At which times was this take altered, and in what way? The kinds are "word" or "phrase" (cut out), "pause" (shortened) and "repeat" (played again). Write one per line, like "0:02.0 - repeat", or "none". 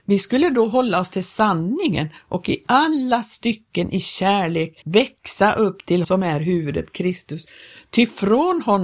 0:04.8 - pause
0:06.0 - word